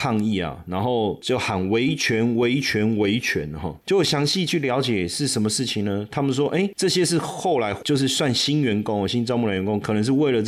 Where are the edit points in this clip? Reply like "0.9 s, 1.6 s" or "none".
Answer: none

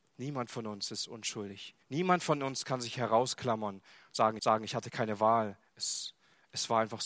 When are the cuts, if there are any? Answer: 1.8 s, 4.4 s, 5.7 s

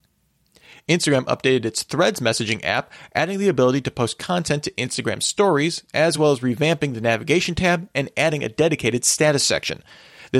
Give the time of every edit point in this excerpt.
none

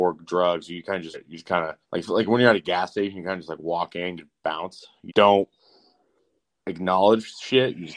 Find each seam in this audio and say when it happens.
1.1 s, 1.8 s, 4.2 s, 5.1 s

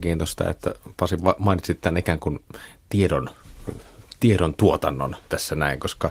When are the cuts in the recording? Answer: none

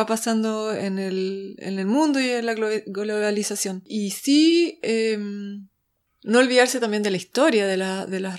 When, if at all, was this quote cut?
none

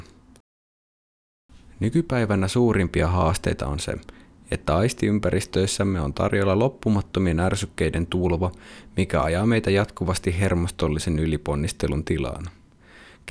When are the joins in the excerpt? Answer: none

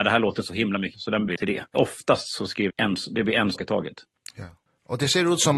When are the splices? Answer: 0.9 s, 1.3 s, 1.7 s, 2.7 s, 3.5 s

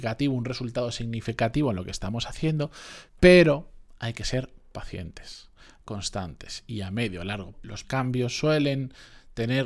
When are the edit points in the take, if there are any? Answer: 3.1 s, 5.8 s, 7.5 s, 7.8 s

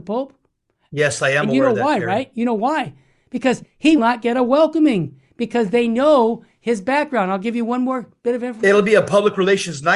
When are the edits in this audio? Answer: 4.0 s

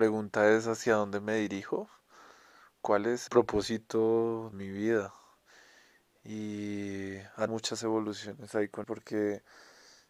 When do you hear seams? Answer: 3.3 s, 4.5 s, 7.5 s, 8.8 s

